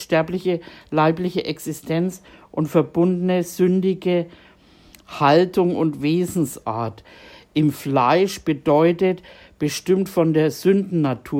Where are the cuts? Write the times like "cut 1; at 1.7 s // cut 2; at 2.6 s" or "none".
none